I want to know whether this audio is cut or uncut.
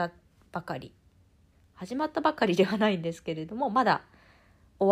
cut